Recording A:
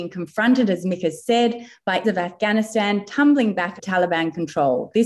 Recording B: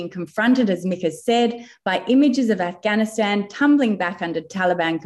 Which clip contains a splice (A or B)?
A